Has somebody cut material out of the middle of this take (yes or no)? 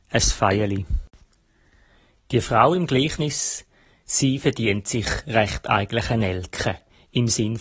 no